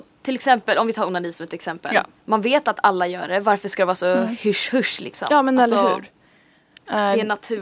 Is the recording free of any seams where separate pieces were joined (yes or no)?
no